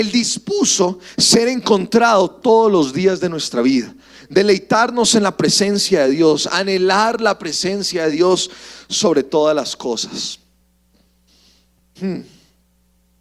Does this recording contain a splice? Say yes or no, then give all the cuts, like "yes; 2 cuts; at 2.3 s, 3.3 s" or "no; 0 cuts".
no; 0 cuts